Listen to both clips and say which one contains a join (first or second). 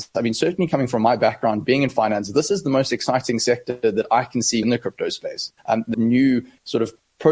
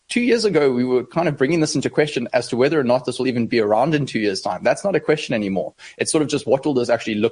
first